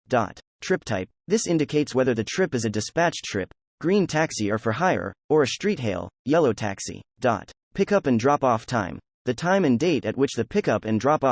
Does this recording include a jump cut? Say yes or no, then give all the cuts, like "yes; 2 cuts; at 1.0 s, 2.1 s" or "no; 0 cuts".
yes; 3 cuts; at 1.2 s, 5.2 s, 7.1 s